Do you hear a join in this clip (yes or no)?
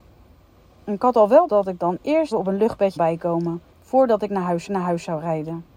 yes